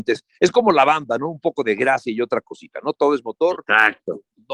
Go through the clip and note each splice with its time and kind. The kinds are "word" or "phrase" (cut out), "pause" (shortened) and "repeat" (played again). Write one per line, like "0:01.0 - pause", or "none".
none